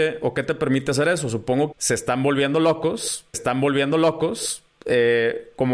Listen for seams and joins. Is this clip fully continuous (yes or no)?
no